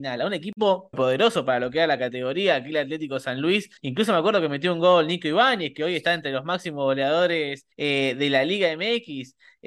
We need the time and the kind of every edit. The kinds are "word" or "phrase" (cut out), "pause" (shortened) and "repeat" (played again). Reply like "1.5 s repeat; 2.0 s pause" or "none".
0.9 s word; 3.8 s pause; 7.7 s pause